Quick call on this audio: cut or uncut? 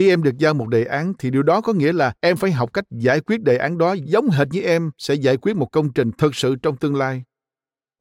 cut